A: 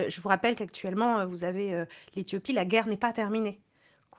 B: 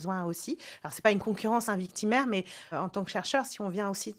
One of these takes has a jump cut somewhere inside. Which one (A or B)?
B